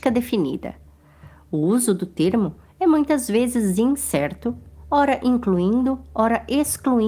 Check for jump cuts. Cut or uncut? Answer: uncut